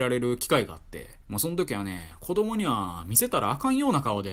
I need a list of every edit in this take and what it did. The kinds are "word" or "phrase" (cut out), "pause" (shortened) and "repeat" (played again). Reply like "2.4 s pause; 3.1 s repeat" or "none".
1.2 s pause